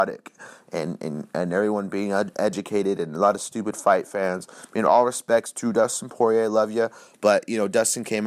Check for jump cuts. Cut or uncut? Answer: uncut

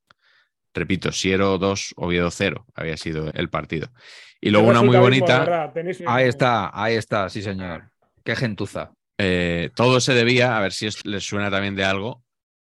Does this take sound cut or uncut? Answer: cut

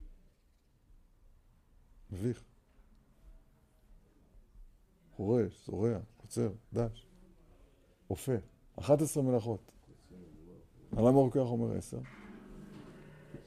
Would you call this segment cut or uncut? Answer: uncut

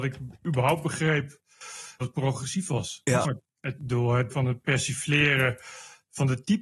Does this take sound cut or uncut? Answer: cut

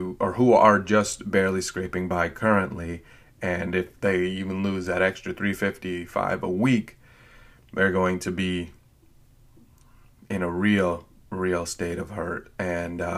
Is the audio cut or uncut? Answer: uncut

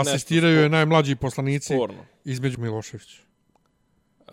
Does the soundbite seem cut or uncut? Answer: cut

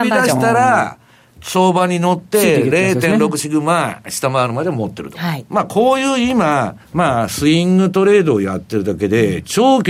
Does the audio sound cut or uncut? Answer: cut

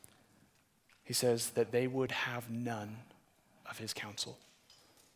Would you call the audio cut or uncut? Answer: uncut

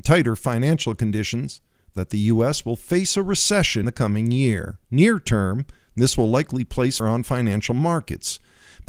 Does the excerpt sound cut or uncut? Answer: cut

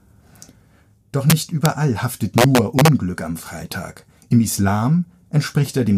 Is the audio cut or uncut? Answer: uncut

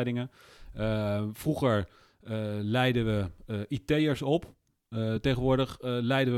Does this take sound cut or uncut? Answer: uncut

